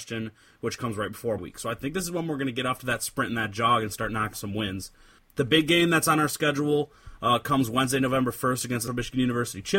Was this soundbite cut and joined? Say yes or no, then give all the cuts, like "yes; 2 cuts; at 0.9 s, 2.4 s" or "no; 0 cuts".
yes; 3 cuts; at 1.4 s, 4.3 s, 8.9 s